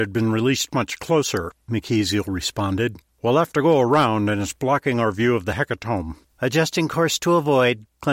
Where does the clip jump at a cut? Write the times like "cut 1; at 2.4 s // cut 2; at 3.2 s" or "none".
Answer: none